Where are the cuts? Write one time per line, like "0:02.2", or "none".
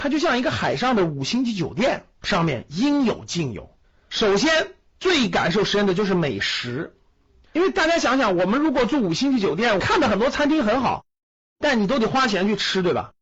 0:03.8
0:04.9